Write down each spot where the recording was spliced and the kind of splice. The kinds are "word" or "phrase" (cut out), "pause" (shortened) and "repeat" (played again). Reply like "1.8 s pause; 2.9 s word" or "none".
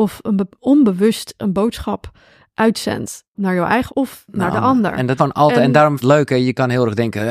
3.3 s word; 3.9 s word; 5.2 s word; 6.0 s phrase